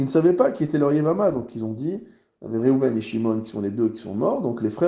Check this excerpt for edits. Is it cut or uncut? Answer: uncut